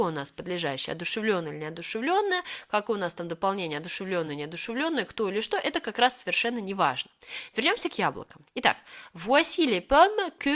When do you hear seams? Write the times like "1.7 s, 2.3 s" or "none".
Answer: none